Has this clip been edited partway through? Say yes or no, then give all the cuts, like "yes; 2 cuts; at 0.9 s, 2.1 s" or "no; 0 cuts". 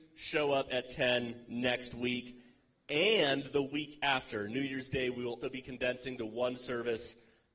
yes; 1 cut; at 5.4 s